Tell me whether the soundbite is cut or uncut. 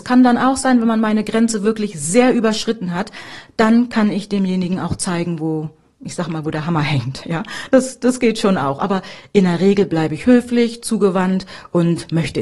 uncut